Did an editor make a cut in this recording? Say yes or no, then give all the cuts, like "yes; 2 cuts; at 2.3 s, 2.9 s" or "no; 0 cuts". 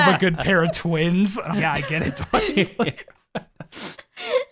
yes; 1 cut; at 1.5 s